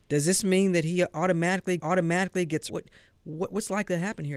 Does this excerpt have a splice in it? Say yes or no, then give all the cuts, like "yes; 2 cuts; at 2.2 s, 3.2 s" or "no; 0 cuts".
yes; 2 cuts; at 1.8 s, 2.7 s